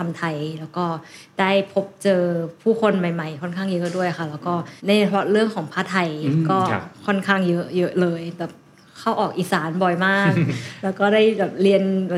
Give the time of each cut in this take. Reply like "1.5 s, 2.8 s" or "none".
4.8 s